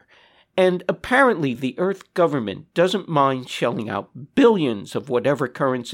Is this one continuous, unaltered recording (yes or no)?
yes